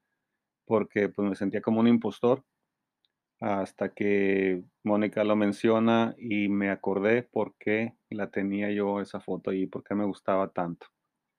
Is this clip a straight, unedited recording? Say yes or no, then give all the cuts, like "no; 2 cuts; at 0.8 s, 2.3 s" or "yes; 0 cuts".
yes; 0 cuts